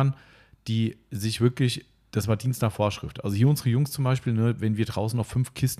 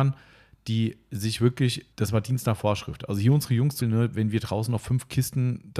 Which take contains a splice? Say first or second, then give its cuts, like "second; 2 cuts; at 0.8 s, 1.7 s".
second; 2 cuts; at 1.9 s, 3.8 s